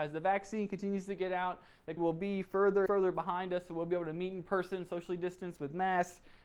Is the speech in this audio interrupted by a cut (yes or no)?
yes